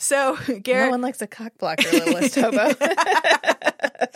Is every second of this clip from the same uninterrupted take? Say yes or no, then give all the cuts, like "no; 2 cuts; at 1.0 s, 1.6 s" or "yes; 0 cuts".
yes; 0 cuts